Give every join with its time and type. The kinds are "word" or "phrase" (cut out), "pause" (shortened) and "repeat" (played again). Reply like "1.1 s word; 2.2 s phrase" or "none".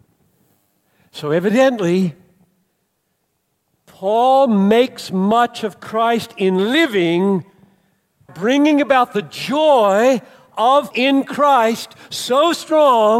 8.3 s word; 10.9 s word